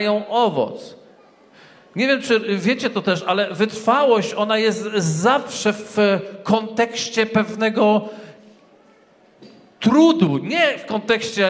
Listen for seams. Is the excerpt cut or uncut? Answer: uncut